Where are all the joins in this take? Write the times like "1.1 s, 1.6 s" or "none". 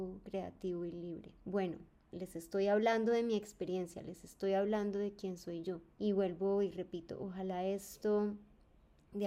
1.4 s, 5.9 s